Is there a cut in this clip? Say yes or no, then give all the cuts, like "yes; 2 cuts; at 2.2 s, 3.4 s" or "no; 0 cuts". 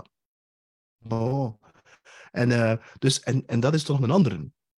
no; 0 cuts